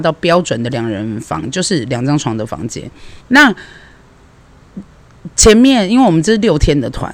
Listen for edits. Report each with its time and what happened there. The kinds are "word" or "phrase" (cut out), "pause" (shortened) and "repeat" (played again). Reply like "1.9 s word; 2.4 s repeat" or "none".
3.2 s pause